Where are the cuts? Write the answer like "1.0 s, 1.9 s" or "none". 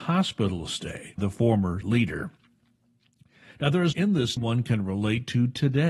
1.2 s, 1.8 s, 3.9 s, 4.4 s